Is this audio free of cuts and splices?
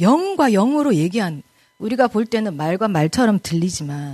yes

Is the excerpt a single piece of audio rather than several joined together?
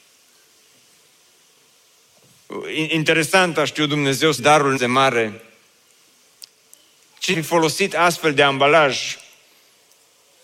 no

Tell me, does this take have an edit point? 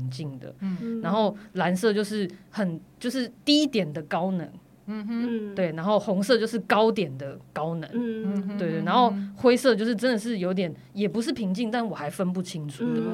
no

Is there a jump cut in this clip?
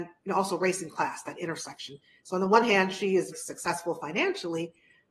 yes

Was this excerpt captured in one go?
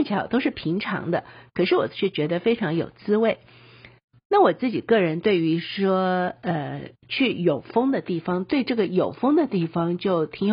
yes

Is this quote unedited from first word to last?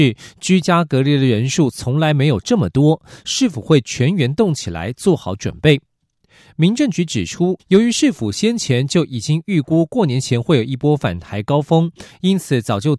no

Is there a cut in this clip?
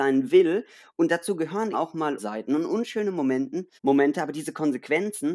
yes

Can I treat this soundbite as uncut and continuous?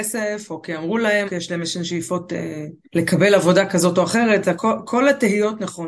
no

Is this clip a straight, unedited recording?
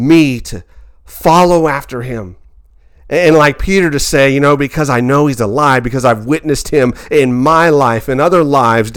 yes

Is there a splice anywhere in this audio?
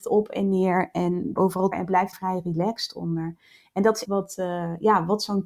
yes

